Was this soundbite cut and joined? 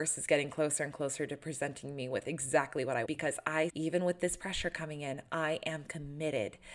yes; 2 cuts; at 3.0 s, 3.7 s

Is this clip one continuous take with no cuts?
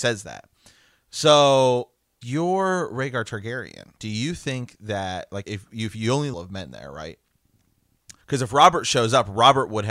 no; 5 cuts; at 2.2 s, 4.0 s, 5.4 s, 6.3 s, 8.2 s

